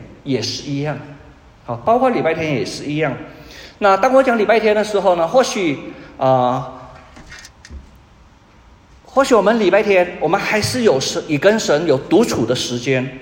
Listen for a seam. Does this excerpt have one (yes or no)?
no